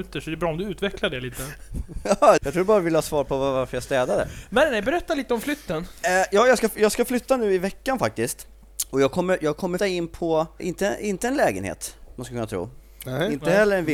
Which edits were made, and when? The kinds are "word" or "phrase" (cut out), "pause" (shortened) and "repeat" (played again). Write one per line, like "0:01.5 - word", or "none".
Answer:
0:02.4 - word
0:09.8 - word
0:10.6 - word